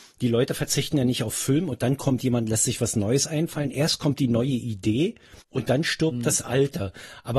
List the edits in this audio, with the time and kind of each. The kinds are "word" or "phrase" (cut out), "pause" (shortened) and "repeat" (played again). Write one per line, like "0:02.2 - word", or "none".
0:05.4 - pause